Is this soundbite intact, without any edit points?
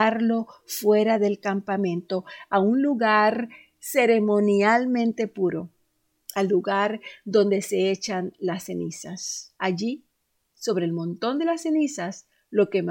no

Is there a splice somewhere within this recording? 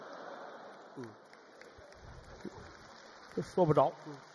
no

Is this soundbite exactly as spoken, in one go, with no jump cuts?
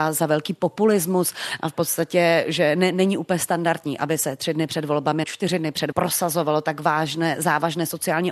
no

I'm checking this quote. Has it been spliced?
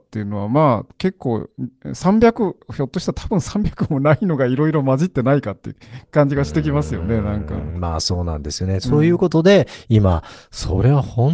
no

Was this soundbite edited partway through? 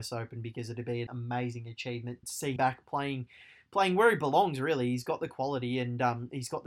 yes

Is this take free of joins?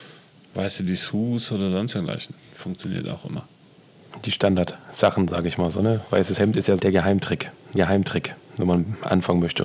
no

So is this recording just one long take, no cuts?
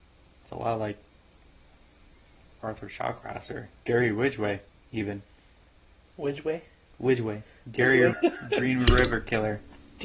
no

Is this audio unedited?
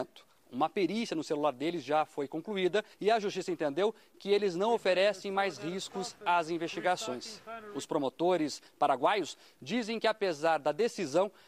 no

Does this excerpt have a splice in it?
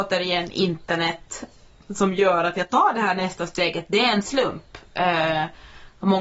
no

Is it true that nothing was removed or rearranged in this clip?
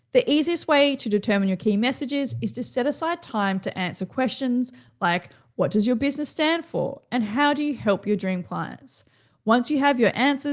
yes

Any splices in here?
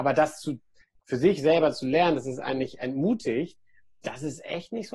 no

